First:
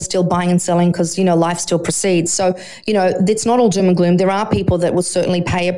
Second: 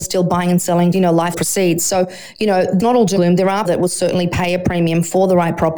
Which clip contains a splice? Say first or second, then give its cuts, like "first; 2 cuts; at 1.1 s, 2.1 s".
second; 5 cuts; at 0.9 s, 1.3 s, 2.8 s, 3.2 s, 3.6 s